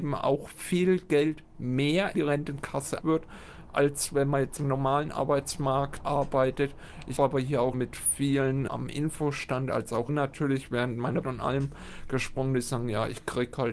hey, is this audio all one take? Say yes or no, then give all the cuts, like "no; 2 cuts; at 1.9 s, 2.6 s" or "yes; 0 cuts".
no; 9 cuts; at 2.1 s, 3.0 s, 4.6 s, 6.0 s, 7.2 s, 7.7 s, 8.7 s, 10.1 s, 11.2 s